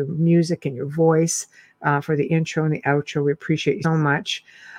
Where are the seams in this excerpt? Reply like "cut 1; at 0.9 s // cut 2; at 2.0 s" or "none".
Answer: cut 1; at 3.8 s